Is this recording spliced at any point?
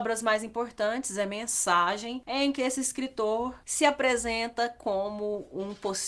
no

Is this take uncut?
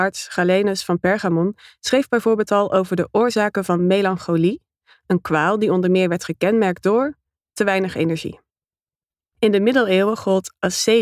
yes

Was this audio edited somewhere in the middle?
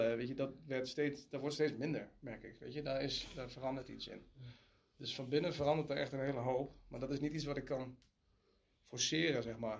no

